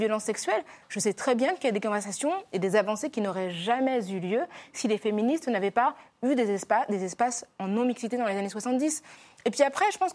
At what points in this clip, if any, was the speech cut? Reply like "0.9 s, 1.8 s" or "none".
none

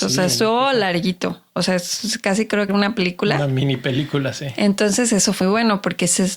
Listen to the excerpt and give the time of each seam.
2.7 s, 5.4 s

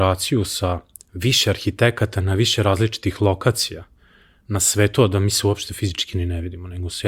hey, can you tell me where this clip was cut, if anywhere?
none

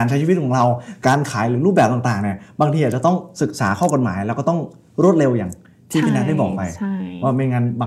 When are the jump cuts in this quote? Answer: none

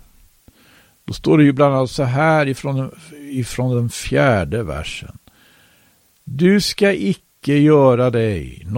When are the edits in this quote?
none

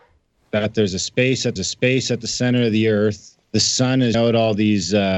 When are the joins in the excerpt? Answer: 1.6 s, 3.4 s, 4.1 s

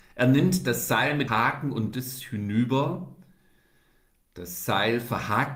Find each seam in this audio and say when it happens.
1.3 s, 1.9 s

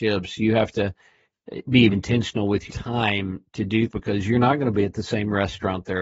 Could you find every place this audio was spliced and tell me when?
1.9 s, 2.7 s, 3.9 s

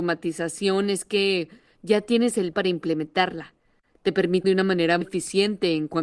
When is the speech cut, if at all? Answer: 2.5 s, 4.4 s, 5.0 s

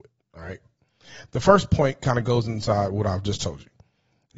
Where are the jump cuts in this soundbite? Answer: none

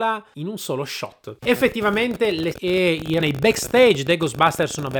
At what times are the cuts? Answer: 2.5 s, 3.2 s

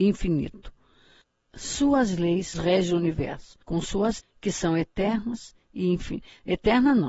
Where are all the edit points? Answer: 1.2 s, 2.5 s, 3.6 s, 4.2 s

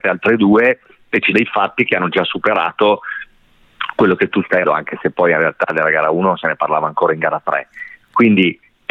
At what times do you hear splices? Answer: 1.3 s, 4.6 s

